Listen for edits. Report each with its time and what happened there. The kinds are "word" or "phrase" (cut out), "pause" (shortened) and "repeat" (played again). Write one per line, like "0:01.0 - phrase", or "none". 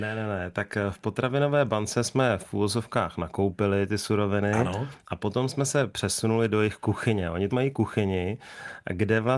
0:07.5 - word